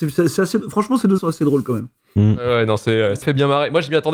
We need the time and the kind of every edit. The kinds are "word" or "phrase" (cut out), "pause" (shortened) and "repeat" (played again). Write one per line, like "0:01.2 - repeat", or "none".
0:01.2 - word
0:03.2 - word